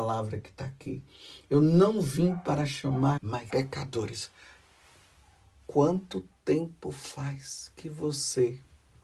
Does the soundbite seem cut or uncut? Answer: cut